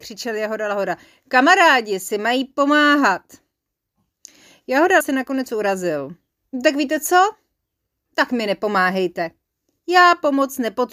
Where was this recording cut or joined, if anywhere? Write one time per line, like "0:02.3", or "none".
0:05.0